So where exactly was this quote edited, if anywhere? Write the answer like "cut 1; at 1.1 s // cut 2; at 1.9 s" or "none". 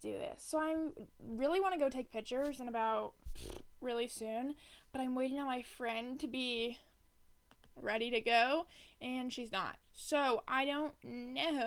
none